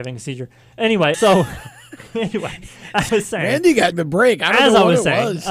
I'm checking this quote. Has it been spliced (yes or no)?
yes